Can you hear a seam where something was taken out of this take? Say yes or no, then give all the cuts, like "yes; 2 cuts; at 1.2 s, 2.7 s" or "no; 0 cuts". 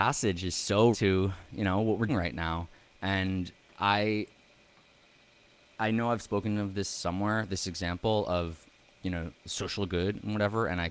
yes; 2 cuts; at 0.9 s, 2.1 s